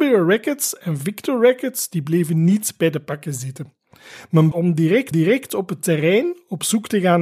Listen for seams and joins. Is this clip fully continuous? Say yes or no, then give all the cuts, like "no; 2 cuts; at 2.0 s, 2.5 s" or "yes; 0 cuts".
no; 2 cuts; at 4.5 s, 5.1 s